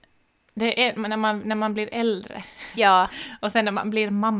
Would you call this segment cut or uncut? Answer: uncut